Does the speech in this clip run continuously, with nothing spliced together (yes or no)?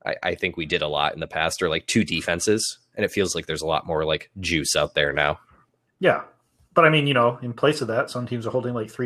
yes